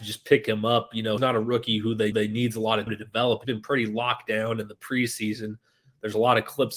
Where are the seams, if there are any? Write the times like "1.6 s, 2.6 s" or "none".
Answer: 1.2 s, 2.1 s, 2.9 s, 3.4 s

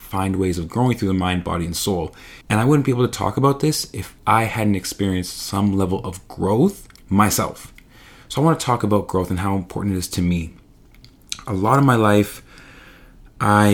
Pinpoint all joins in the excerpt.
2.4 s, 4.2 s, 7.0 s

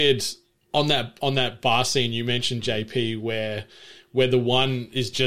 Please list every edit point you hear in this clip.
none

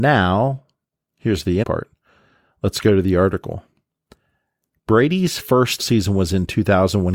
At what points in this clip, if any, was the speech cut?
1.6 s, 5.8 s

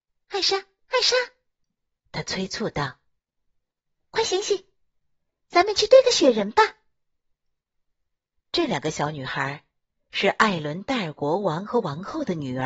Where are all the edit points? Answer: none

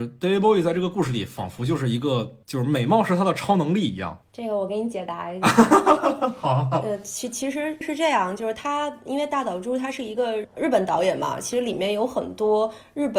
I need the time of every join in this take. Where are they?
2.4 s

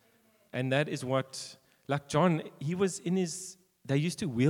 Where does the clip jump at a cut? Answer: none

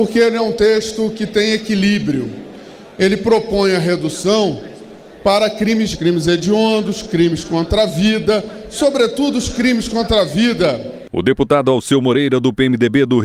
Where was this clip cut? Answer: 2.9 s, 5.9 s

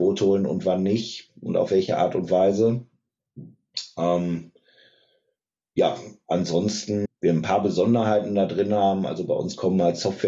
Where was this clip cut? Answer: 7.1 s

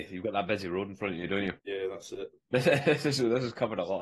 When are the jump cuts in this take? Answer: 1.6 s

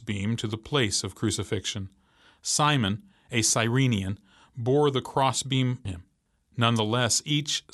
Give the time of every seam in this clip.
5.9 s

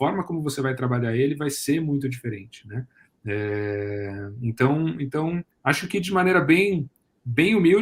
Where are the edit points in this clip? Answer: 5.5 s

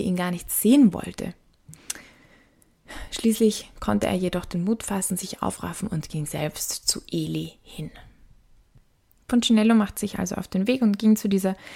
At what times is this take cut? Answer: none

